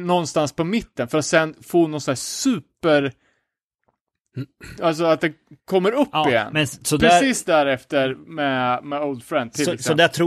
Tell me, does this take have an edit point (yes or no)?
no